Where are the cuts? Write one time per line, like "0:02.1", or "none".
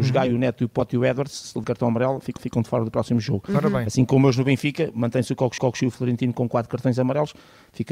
0:01.6
0:02.4
0:05.6